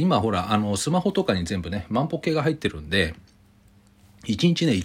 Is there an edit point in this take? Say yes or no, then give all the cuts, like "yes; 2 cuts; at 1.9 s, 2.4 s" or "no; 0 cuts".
no; 0 cuts